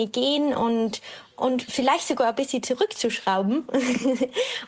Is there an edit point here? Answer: no; 0 cuts

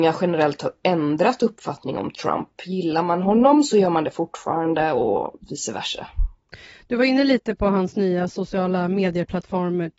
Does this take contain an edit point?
yes; 1 cut; at 5.4 s

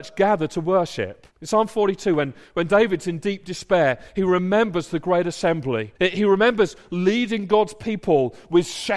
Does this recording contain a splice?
yes; 2 cuts; at 1.3 s, 6.0 s

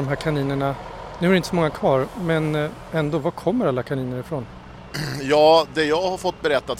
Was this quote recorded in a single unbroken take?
yes; 0 cuts

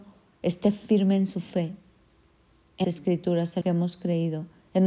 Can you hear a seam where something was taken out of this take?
yes; 2 cuts; at 2.8 s, 3.6 s

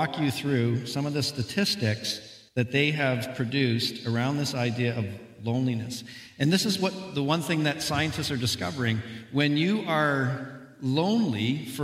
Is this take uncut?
no; 1 cut; at 2.5 s

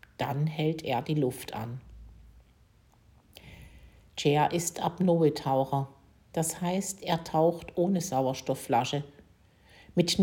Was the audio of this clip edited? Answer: no; 0 cuts

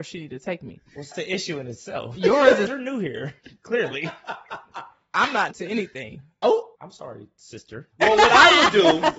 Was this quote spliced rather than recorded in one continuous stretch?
yes; 4 cuts; at 1.1 s, 2.7 s, 5.5 s, 6.8 s

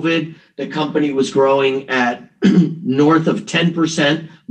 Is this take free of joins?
yes; 0 cuts

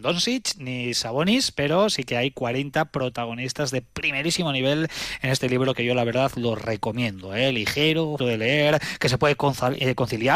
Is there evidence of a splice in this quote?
yes; 1 cut; at 8.2 s

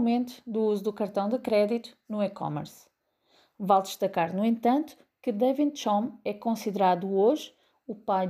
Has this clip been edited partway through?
no; 0 cuts

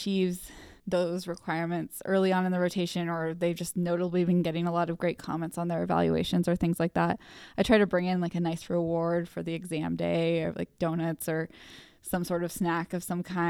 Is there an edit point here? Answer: no; 0 cuts

